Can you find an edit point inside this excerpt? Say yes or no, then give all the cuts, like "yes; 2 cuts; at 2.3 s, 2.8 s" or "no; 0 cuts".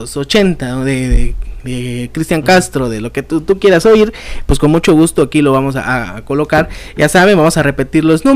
no; 0 cuts